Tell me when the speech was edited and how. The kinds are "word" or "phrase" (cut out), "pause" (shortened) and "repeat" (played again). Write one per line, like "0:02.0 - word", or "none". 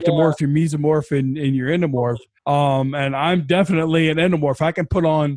0:02.4 - pause